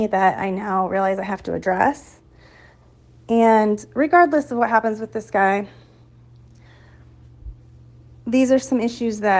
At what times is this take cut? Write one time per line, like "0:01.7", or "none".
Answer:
none